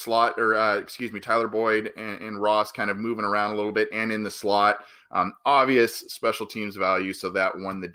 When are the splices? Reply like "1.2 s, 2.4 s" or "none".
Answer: none

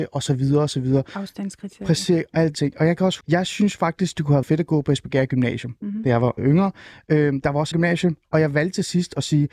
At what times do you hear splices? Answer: 2.5 s, 3.2 s, 4.4 s, 6.4 s, 7.7 s

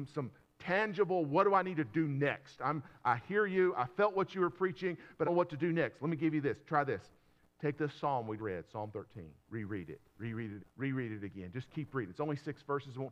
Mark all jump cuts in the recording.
5.2 s, 8.4 s, 9.4 s, 10.1 s, 10.6 s

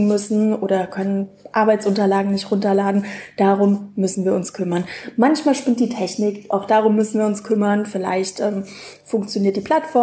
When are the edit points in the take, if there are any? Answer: none

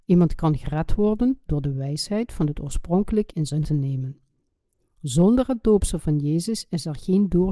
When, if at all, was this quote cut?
3.3 s, 3.6 s

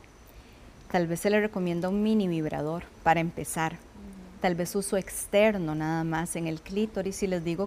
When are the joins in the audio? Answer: none

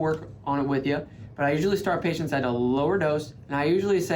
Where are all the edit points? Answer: none

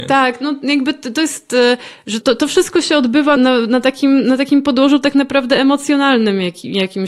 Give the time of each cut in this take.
2.2 s, 3.4 s

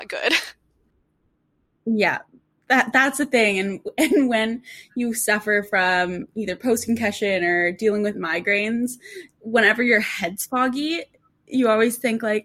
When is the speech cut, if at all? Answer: none

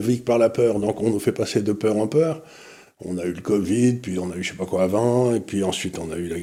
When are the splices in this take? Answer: none

